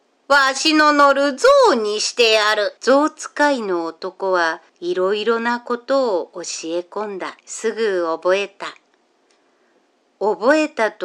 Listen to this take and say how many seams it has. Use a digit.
3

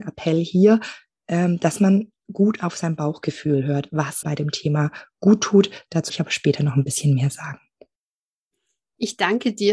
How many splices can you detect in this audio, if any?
2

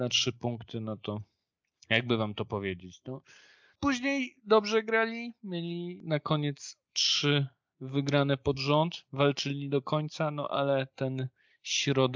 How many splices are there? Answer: 0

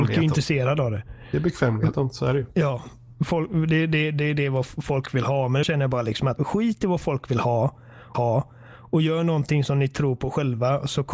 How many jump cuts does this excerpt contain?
3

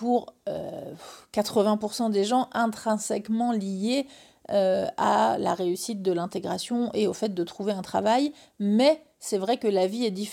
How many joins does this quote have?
0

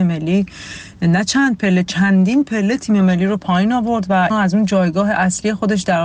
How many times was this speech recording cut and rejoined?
1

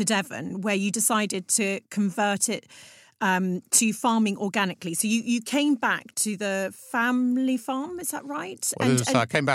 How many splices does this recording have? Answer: 0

